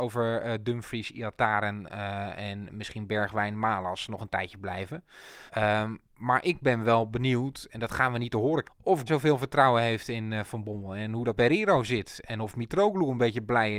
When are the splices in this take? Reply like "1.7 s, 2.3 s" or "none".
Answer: 5.5 s, 8.6 s, 9.1 s, 11.4 s

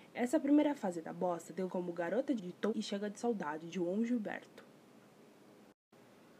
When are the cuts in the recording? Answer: 1.7 s, 2.4 s, 2.7 s, 3.7 s

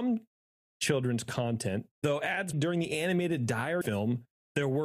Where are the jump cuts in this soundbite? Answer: 1.9 s, 2.5 s, 3.8 s

